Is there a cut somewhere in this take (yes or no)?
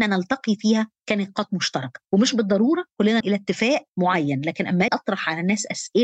yes